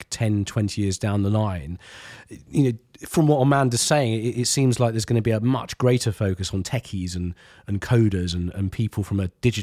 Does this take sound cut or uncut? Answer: uncut